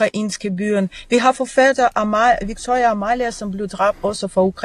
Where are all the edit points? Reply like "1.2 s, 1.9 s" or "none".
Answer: none